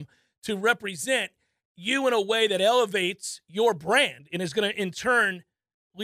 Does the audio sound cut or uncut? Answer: uncut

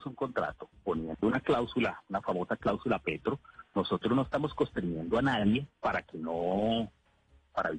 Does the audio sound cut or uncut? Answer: uncut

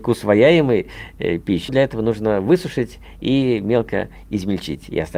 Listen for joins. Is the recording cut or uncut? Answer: cut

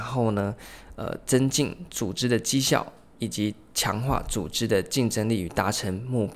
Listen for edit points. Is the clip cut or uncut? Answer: uncut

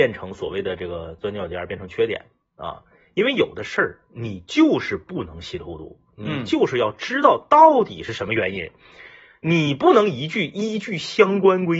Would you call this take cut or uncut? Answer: uncut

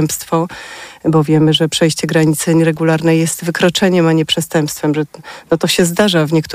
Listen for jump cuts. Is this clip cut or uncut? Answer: uncut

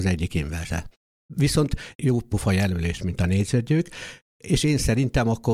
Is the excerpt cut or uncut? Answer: cut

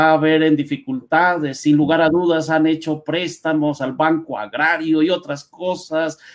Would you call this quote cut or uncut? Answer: uncut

